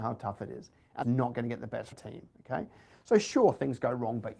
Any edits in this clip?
yes; 2 cuts; at 1.0 s, 1.9 s

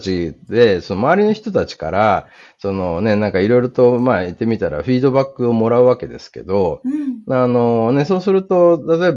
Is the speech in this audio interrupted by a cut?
no; 0 cuts

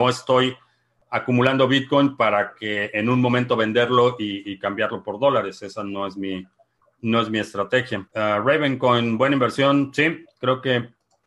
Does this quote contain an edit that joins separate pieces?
yes; 1 cut; at 8.1 s

